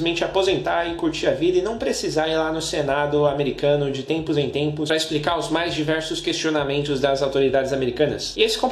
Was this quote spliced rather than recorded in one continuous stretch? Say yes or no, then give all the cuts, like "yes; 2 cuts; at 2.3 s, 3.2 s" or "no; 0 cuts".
no; 0 cuts